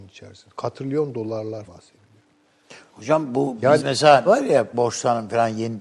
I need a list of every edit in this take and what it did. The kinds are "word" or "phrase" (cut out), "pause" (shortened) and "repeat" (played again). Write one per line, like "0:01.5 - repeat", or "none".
0:01.7 - phrase
0:03.8 - word
0:04.3 - word
0:04.7 - phrase